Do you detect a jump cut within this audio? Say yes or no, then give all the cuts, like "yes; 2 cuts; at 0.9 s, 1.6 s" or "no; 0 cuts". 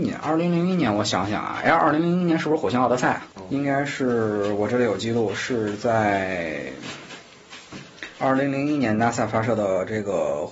yes; 1 cut; at 3.3 s